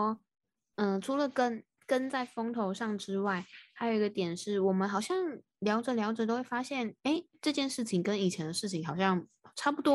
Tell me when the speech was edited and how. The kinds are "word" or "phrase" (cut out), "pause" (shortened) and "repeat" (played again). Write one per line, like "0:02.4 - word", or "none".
none